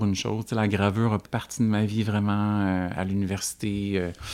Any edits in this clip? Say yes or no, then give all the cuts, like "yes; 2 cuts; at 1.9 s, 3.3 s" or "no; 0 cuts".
yes; 1 cut; at 1.2 s